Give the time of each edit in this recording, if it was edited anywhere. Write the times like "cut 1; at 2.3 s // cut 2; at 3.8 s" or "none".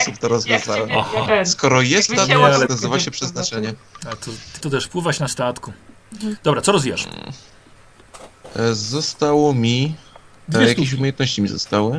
cut 1; at 1.3 s // cut 2; at 2.1 s // cut 3; at 2.7 s // cut 4; at 4.6 s // cut 5; at 5.3 s // cut 6; at 10.5 s